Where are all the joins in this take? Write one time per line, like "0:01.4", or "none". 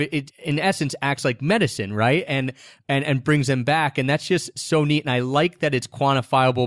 none